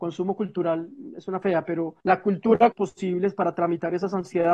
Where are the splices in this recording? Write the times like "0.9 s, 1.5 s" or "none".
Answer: 1.4 s, 2.0 s, 2.7 s